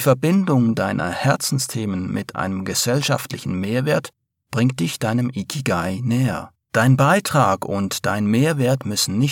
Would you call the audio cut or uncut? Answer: cut